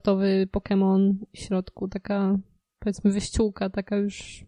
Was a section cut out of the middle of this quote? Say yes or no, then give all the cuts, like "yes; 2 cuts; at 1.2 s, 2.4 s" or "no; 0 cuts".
no; 0 cuts